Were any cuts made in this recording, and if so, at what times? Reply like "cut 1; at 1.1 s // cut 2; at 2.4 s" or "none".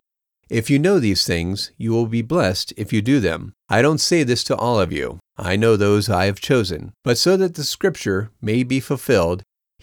cut 1; at 3.6 s // cut 2; at 5.3 s // cut 3; at 7.0 s